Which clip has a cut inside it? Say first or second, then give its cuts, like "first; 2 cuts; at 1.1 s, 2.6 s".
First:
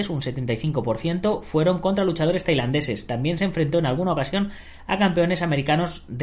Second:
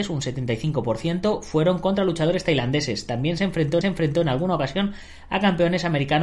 second; 1 cut; at 3.8 s